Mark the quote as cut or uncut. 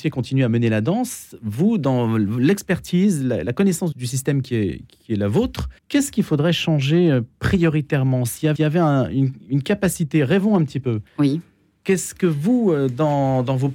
cut